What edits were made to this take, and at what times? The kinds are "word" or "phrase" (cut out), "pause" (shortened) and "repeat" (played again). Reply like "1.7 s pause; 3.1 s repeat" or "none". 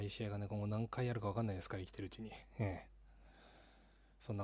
none